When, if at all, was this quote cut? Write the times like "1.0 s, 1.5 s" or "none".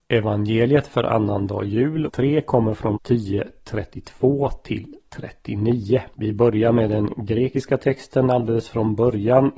2.1 s, 3.0 s, 6.1 s